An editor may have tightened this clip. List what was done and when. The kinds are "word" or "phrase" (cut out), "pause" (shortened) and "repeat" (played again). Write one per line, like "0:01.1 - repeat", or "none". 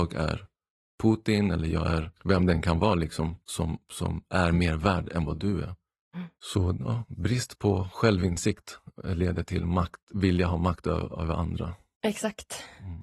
0:02.2 - pause
0:03.4 - pause
0:06.4 - pause